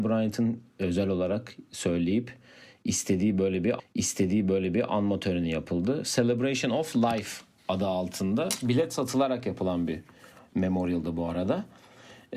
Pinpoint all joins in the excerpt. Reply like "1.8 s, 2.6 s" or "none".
3.8 s